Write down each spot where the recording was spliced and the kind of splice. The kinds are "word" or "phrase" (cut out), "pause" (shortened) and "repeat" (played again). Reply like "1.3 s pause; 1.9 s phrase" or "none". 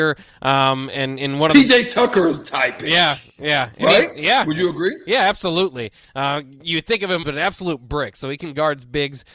7.2 s word